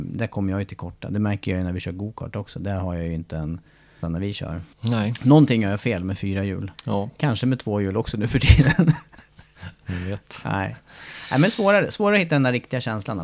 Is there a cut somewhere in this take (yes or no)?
yes